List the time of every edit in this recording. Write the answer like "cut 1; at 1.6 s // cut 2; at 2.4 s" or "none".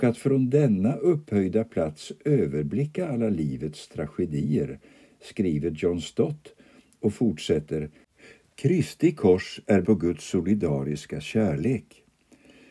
cut 1; at 9.8 s